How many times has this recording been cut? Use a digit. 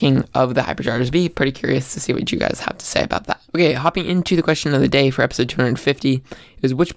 1